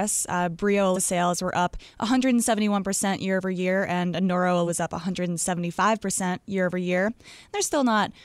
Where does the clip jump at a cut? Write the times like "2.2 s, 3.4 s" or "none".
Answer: 0.9 s, 4.7 s

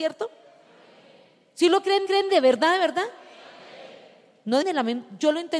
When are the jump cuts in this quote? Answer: 2.1 s, 4.6 s

